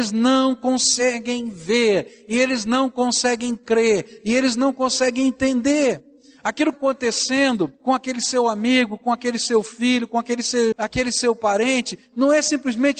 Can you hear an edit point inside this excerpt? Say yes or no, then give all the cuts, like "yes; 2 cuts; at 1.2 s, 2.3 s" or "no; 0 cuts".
yes; 3 cuts; at 6.7 s, 7.7 s, 10.7 s